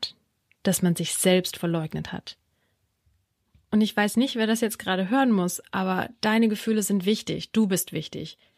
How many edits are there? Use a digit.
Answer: 0